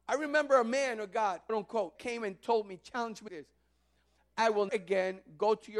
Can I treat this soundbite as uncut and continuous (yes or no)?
no